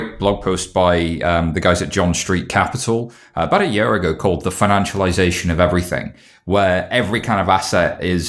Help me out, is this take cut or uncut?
uncut